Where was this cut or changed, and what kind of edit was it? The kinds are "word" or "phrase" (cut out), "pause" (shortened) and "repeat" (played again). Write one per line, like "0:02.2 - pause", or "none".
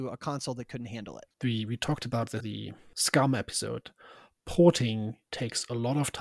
0:02.4 - word